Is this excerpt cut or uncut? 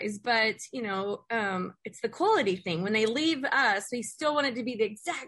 uncut